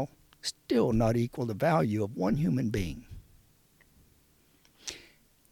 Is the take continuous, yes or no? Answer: yes